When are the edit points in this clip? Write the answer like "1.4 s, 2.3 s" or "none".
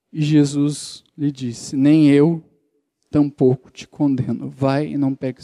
none